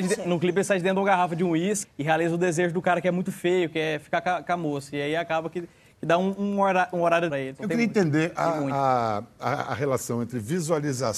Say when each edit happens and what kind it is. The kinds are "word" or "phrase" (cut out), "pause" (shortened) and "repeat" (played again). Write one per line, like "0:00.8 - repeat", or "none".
0:01.8 - word
0:07.3 - phrase